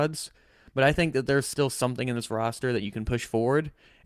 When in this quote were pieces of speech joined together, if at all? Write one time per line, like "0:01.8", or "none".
none